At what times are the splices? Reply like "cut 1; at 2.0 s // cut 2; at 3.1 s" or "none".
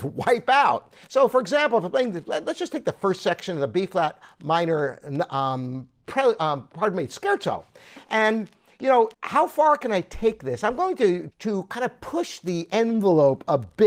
cut 1; at 1.0 s // cut 2; at 9.1 s // cut 3; at 11.3 s